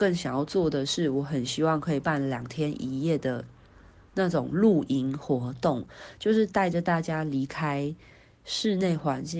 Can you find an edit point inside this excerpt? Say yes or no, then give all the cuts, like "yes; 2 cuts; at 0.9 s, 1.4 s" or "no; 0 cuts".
no; 0 cuts